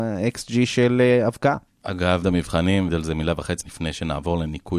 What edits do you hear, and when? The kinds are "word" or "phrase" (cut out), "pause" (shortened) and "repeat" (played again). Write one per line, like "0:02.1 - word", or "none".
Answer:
0:02.2 - word
0:02.9 - word
0:03.6 - word